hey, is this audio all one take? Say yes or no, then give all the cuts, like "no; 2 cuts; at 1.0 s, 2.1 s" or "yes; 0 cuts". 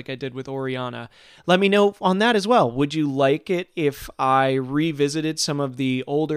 yes; 0 cuts